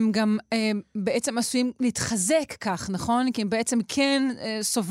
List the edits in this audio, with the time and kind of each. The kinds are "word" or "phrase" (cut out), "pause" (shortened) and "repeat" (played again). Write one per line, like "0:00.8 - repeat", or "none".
none